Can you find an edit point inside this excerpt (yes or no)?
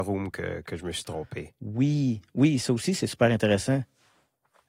no